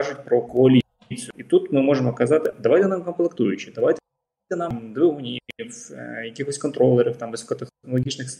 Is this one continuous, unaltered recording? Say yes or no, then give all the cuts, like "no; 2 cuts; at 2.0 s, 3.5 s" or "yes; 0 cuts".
yes; 0 cuts